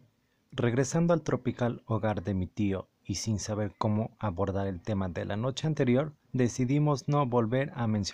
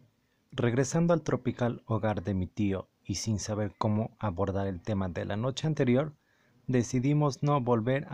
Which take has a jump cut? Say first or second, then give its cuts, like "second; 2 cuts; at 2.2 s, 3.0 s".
first; 1 cut; at 6.2 s